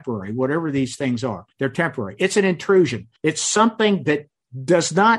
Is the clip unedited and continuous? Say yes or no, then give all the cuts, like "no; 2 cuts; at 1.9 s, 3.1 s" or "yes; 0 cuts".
no; 2 cuts; at 1.5 s, 3.2 s